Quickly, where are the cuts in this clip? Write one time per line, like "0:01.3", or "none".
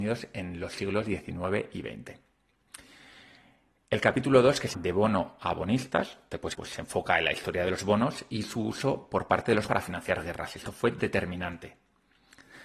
0:04.7
0:06.5
0:09.7